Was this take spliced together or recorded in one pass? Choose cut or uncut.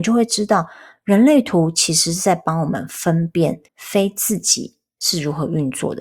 cut